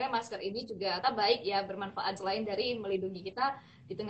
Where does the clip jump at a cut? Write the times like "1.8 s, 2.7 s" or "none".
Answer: 1.0 s, 2.2 s